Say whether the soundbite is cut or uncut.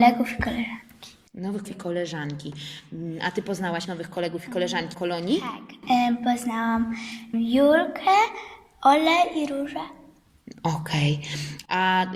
cut